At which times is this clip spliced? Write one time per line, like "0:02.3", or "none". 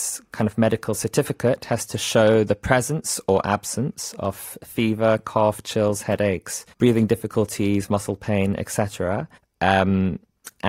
0:06.7
0:09.4